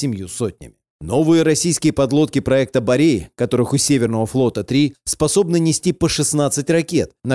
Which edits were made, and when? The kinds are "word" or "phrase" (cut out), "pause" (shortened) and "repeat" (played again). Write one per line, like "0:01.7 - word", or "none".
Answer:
none